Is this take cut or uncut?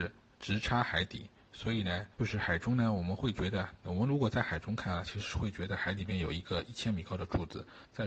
cut